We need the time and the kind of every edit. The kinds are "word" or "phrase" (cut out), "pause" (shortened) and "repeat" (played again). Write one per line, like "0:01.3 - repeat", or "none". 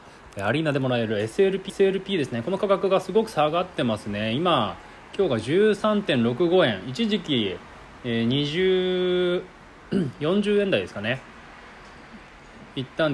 0:01.7 - repeat